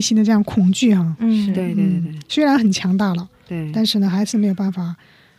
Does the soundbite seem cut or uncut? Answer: uncut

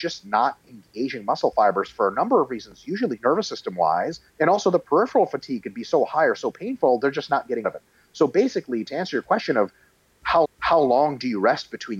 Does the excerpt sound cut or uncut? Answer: cut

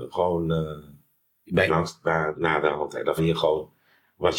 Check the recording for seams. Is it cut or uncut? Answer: cut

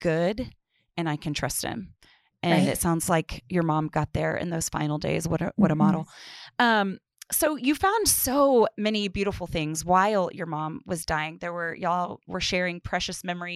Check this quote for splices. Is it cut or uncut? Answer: uncut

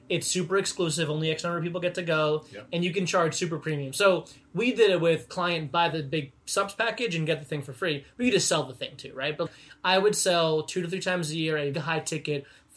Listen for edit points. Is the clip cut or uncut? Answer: cut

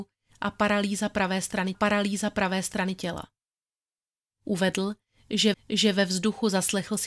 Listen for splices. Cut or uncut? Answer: cut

